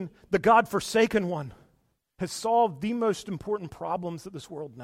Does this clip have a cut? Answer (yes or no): yes